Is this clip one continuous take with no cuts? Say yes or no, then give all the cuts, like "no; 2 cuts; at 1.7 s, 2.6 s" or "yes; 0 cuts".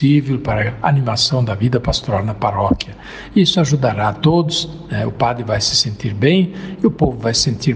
yes; 0 cuts